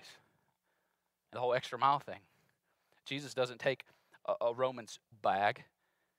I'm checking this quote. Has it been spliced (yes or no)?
yes